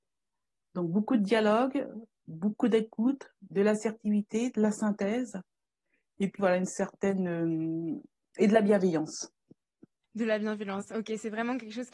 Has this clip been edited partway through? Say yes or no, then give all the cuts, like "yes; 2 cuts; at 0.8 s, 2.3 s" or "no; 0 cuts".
yes; 1 cut; at 6.4 s